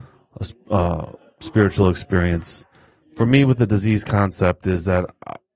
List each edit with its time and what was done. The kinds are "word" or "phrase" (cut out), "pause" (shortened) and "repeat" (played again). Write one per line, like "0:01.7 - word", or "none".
none

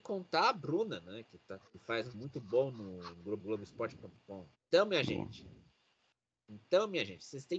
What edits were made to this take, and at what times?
0:01.7 - pause
0:02.1 - word
0:03.4 - phrase
0:04.5 - pause

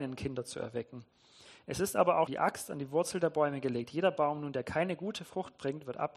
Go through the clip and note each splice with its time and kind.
0:02.3 - word

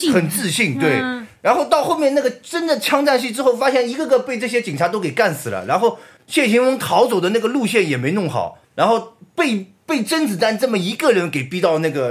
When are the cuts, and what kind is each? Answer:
0:06.2 - pause
0:08.6 - pause

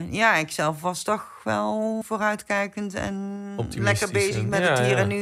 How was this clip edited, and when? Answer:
0:02.0 - word

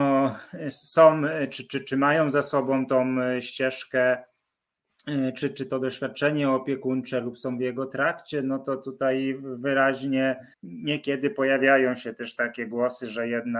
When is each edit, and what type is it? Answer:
0:10.5 - pause

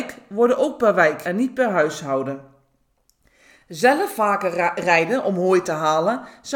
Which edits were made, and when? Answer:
0:01.2 - word

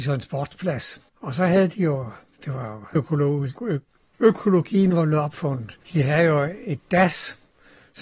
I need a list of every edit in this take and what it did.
0:01.1 - pause
0:02.9 - word
0:03.6 - word
0:05.8 - pause

